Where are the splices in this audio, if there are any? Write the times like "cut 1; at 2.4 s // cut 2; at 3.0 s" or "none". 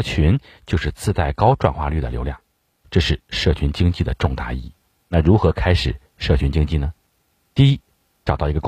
none